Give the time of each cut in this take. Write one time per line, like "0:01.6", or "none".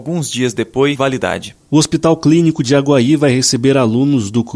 0:01.0